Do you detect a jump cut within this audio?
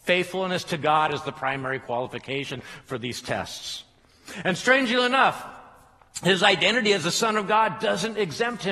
no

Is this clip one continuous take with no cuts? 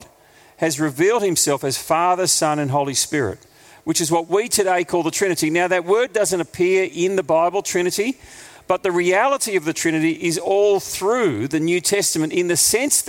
yes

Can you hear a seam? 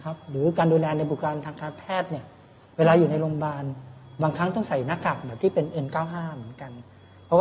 no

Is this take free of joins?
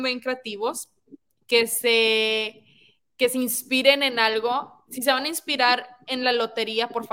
yes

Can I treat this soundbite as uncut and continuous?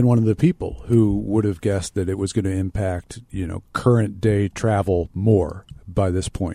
yes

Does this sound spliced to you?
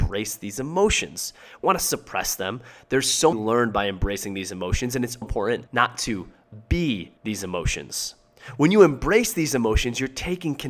yes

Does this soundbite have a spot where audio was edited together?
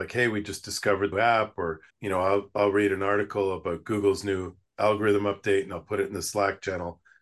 yes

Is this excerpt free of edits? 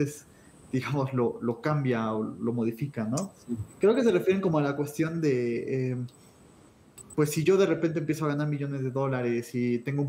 yes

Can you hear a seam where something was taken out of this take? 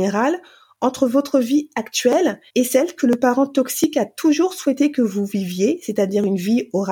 yes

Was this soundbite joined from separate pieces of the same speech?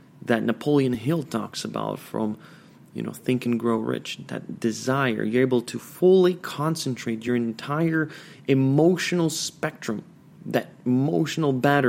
no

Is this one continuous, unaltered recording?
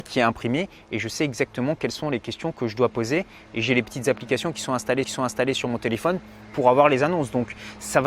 no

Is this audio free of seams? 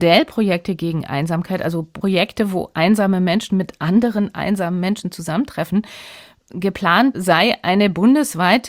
yes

